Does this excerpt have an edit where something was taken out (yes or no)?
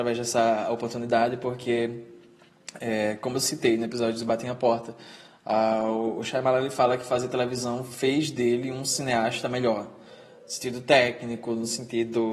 no